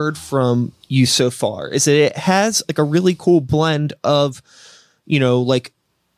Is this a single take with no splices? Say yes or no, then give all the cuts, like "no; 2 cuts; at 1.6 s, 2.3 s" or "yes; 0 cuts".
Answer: yes; 0 cuts